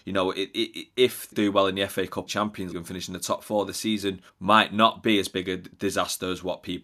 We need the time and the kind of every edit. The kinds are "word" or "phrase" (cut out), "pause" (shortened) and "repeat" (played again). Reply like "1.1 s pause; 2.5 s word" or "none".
1.3 s phrase; 2.3 s phrase; 2.7 s word; 4.3 s pause; 5.7 s pause